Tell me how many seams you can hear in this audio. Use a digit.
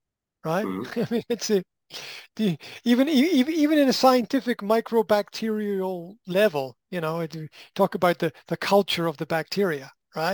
0